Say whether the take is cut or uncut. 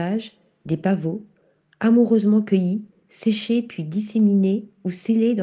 uncut